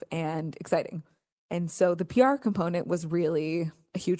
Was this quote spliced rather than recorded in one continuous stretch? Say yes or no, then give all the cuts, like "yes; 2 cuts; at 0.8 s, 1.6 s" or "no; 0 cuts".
no; 0 cuts